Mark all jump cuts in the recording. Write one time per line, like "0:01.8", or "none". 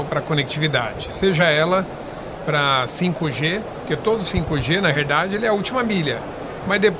none